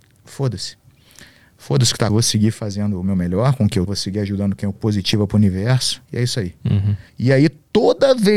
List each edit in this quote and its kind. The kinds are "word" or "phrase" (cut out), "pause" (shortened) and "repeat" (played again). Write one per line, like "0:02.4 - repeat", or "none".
0:02.1 - word
0:03.9 - word
0:04.7 - phrase
0:06.0 - pause
0:07.1 - pause